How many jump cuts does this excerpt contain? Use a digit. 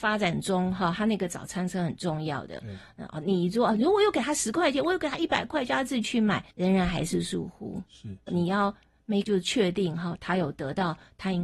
3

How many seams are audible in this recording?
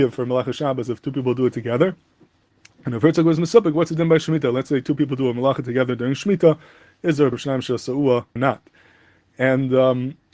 2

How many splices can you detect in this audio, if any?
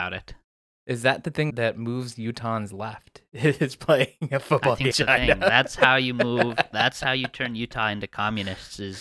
2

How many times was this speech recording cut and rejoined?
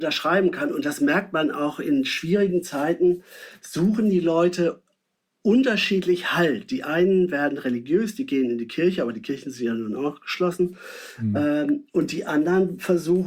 0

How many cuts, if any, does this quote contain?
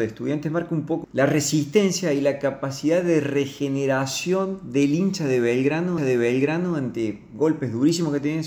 2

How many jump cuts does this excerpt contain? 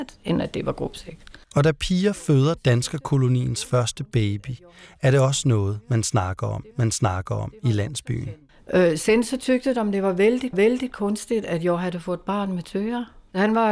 4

